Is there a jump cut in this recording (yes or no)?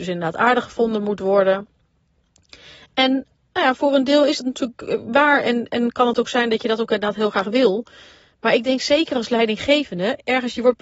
no